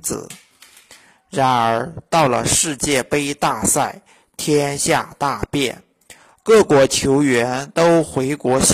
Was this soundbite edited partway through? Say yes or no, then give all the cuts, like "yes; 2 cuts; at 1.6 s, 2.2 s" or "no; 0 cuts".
no; 0 cuts